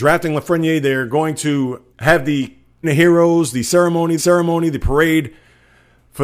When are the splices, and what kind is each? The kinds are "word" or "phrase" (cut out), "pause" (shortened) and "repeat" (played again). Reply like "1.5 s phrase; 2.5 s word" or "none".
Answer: 1.9 s pause; 2.8 s word; 4.2 s repeat